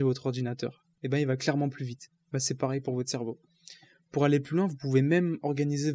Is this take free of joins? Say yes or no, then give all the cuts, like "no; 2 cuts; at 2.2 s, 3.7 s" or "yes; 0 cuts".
yes; 0 cuts